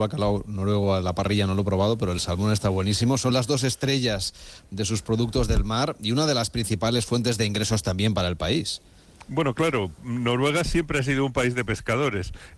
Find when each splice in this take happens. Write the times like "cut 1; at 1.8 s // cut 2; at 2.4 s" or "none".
none